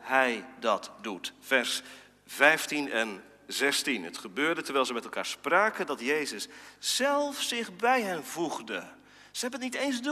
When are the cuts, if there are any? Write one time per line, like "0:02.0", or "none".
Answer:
none